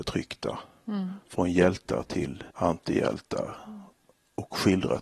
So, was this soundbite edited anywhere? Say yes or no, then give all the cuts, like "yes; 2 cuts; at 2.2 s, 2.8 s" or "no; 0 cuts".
yes; 1 cut; at 2.5 s